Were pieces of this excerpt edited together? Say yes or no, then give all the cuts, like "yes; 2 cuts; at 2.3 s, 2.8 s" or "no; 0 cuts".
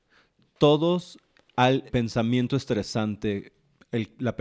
yes; 1 cut; at 1.9 s